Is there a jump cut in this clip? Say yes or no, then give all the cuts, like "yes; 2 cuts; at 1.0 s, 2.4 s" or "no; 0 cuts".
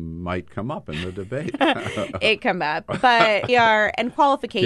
yes; 2 cuts; at 2.4 s, 3.5 s